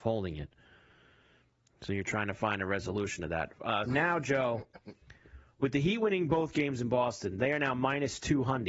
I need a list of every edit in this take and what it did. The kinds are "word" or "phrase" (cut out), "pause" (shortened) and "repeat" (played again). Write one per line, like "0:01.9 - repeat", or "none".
0:03.9 - word